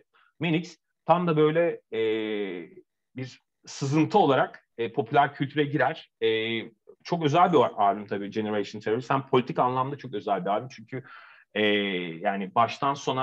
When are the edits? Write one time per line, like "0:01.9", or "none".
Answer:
0:06.9